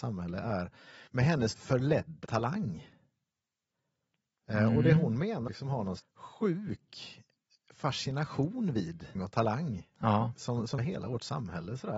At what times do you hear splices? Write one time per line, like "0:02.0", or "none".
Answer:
0:01.1
0:01.5
0:02.2
0:05.5
0:06.0
0:09.1
0:10.8